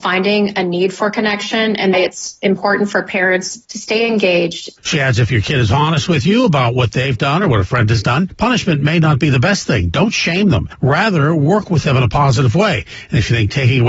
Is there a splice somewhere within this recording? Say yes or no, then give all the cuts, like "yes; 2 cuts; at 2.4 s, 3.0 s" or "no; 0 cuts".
yes; 1 cut; at 1.9 s